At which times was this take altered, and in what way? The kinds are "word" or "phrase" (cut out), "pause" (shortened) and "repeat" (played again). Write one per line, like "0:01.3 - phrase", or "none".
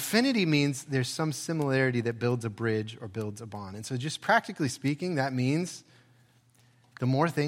none